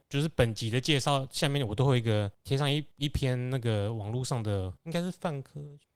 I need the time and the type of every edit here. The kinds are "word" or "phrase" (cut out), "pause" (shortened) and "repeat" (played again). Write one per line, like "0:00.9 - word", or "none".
none